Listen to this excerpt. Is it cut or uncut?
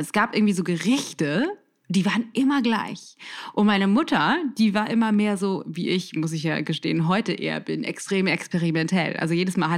uncut